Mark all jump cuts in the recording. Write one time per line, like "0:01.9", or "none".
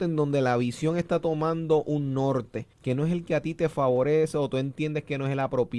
0:02.7

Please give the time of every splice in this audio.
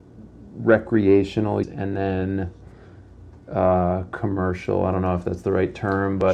0:01.6

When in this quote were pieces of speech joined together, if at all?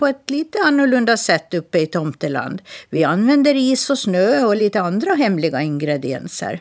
none

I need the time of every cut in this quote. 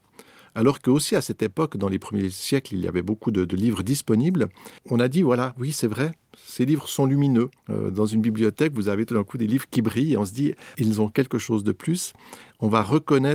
0:04.8
0:07.6
0:10.7

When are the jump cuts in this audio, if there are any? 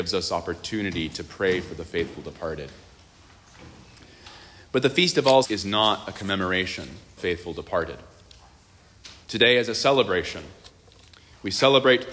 0:05.4
0:07.2
0:09.2

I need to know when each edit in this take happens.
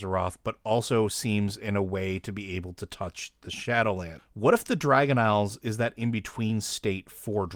none

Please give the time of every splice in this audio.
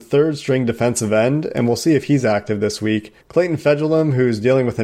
0:03.2

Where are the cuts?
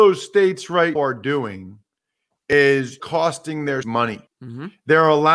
0:01.0
0:03.0
0:03.8
0:04.3

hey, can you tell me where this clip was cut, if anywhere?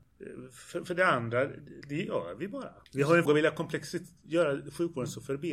0:01.8
0:02.9
0:03.2

